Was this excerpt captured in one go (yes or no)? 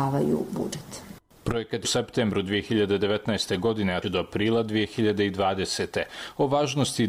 no